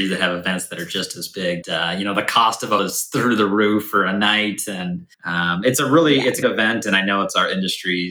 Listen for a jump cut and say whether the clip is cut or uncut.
cut